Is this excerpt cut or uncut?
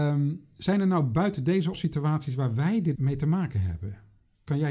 cut